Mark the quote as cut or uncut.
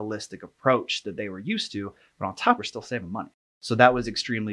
cut